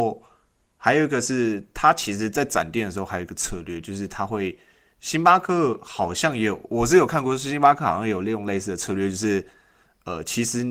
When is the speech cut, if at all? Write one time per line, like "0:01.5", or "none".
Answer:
none